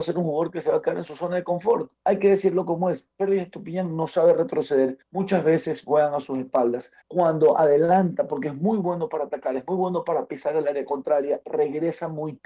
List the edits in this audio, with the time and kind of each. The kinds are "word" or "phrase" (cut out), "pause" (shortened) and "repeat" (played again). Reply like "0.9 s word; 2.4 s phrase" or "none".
1.9 s pause; 5.0 s pause; 7.0 s pause